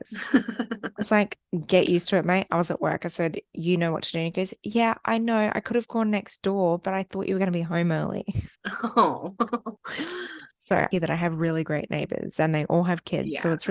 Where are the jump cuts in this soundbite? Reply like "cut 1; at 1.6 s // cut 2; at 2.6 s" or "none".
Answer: cut 1; at 10.9 s